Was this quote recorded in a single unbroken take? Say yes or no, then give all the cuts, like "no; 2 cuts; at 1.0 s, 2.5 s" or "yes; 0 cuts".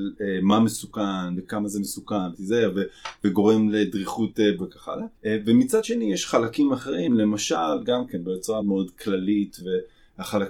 no; 4 cuts; at 2.3 s, 4.6 s, 5.2 s, 8.6 s